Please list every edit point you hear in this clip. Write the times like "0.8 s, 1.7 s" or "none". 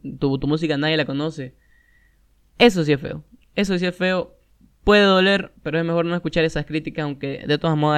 none